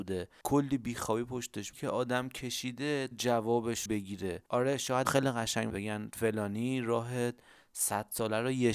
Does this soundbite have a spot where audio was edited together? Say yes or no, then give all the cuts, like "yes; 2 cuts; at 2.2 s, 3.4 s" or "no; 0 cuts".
yes; 6 cuts; at 1.7 s, 3.1 s, 3.9 s, 4.5 s, 5.0 s, 5.7 s